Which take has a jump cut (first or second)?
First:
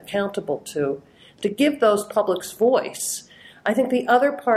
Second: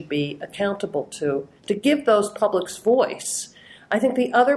second